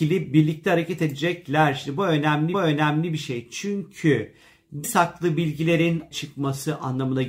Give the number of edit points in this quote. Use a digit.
3